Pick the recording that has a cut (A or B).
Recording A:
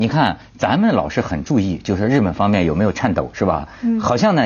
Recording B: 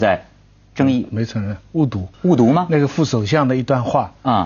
B